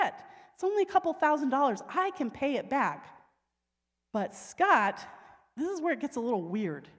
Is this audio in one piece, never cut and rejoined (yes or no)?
yes